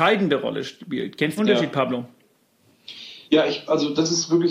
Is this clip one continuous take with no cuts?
no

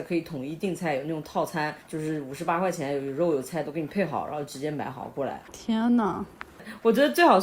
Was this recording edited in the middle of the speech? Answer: yes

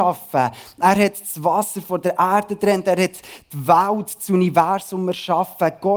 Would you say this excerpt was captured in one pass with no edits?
yes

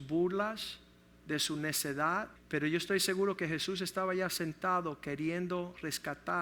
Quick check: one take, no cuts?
no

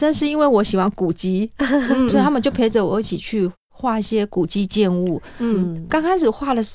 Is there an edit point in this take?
yes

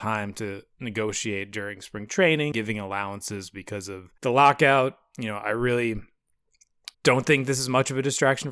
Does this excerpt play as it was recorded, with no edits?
no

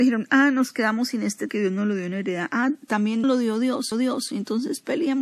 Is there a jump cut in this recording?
yes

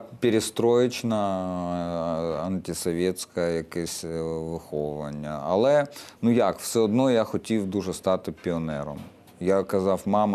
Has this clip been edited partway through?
no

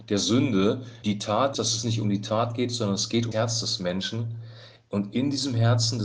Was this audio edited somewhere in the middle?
yes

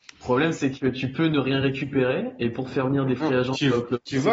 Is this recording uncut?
yes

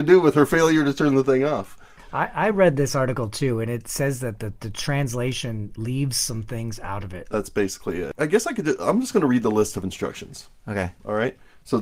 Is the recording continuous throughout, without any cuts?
yes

